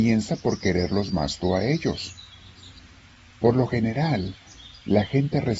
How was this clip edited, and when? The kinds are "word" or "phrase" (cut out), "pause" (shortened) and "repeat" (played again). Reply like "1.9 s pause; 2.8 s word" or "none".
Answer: none